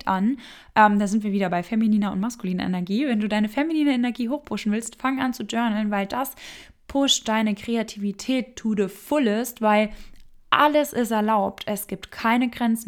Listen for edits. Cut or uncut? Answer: uncut